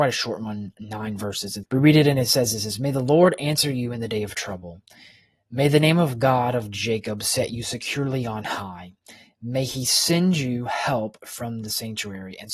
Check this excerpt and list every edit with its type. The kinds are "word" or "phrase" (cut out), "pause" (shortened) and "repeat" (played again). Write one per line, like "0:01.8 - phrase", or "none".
0:01.6 - word